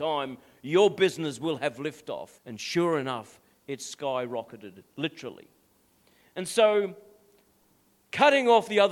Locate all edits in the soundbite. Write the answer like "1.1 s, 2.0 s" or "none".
2.4 s